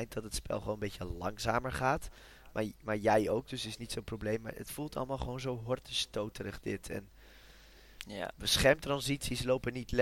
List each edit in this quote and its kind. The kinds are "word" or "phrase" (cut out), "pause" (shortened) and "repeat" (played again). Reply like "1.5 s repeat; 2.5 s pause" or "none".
none